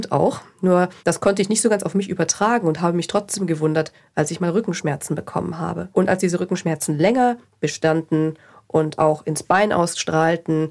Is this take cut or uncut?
cut